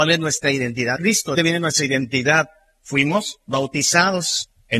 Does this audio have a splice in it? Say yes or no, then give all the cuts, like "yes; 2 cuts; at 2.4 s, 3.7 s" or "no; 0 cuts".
yes; 2 cuts; at 1.0 s, 1.3 s